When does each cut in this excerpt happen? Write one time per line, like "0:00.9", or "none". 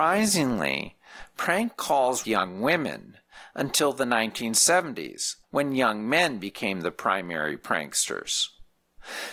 0:02.2
0:05.4

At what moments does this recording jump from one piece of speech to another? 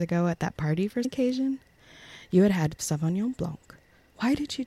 0:01.0
0:02.8

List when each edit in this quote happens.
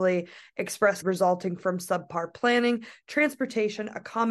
0:01.0

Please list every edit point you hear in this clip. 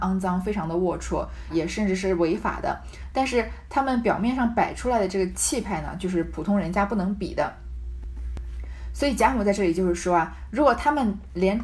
0:01.5

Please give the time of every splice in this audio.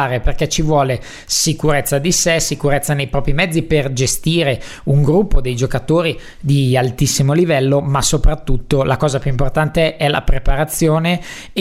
none

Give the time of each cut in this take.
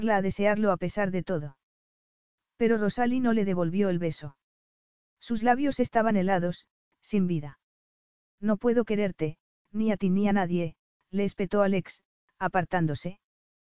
none

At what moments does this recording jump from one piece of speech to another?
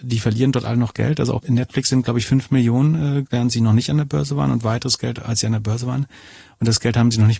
0:01.4
0:03.2

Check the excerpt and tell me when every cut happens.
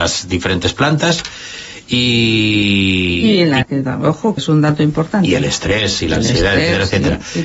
0:03.6
0:04.4

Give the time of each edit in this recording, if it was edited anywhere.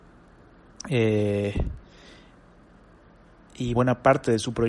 0:03.7

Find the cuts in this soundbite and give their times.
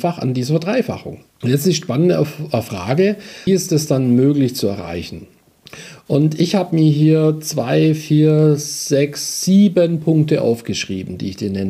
0:01.3
0:03.5

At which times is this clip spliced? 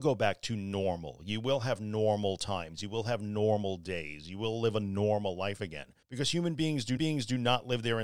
0:06.0
0:07.0

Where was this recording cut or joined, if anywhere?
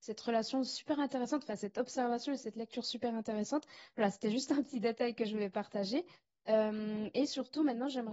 none

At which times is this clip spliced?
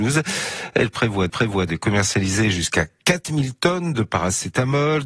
0:01.3

